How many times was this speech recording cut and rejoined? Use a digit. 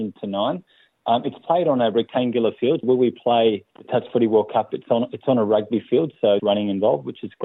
3